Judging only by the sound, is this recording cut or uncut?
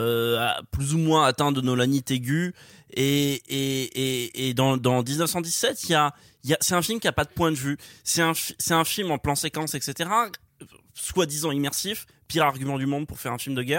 uncut